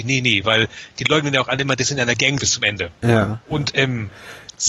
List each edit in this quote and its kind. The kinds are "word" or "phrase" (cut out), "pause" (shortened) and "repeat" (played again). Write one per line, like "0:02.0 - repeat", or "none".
0:02.4 - word